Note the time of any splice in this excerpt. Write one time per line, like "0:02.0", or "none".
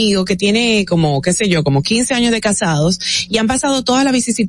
none